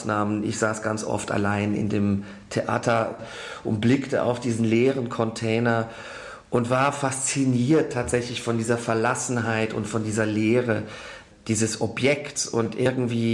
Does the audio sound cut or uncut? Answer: uncut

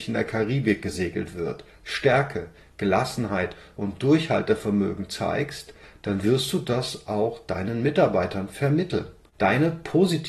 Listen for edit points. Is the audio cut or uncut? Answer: uncut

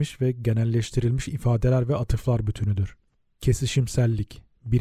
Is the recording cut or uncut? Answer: uncut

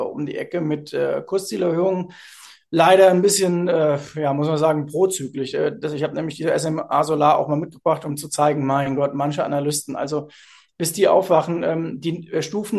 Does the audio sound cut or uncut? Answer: uncut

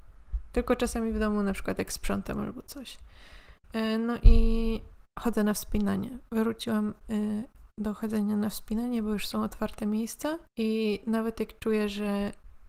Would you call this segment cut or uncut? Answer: cut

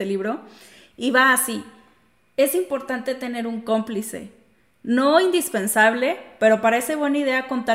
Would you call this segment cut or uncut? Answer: uncut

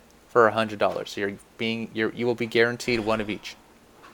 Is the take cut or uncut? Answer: uncut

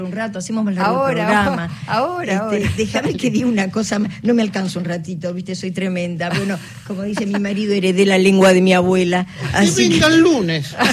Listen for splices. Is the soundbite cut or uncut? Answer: uncut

